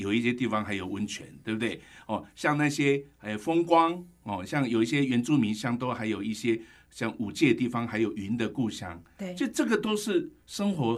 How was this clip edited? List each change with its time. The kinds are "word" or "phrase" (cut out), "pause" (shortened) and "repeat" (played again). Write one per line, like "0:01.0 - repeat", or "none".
none